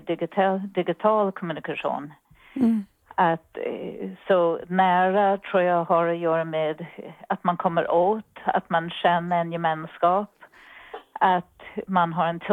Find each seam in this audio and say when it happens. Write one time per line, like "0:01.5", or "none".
none